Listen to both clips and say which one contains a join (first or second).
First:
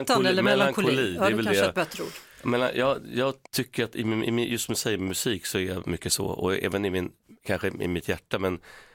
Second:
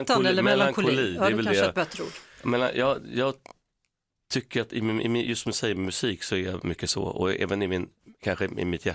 first